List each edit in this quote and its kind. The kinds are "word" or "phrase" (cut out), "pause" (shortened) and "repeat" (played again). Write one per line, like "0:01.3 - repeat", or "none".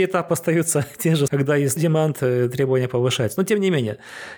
0:01.3 - word
0:01.8 - word